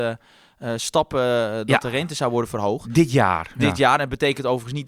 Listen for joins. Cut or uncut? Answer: uncut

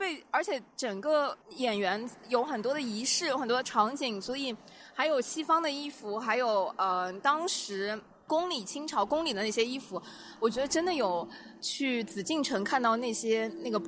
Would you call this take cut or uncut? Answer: uncut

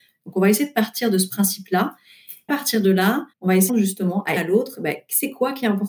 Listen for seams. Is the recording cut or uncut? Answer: cut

